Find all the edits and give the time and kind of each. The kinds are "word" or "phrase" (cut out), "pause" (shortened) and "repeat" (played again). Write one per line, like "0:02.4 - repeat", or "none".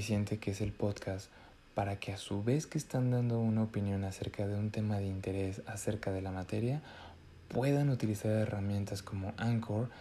none